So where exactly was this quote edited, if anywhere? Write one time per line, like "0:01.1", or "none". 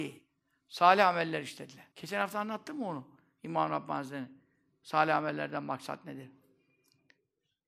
0:01.9